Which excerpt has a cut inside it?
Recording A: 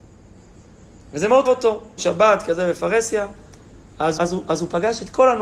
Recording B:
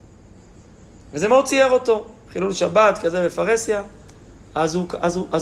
A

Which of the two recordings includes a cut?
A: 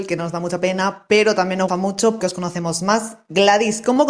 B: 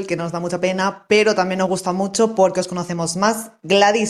A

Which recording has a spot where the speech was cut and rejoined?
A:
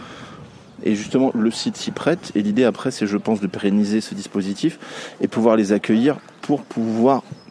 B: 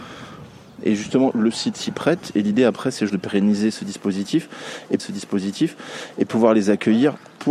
B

